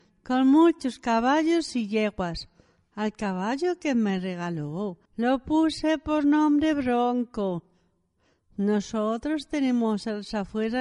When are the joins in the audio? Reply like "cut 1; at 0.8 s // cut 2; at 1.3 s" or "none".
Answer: cut 1; at 5.1 s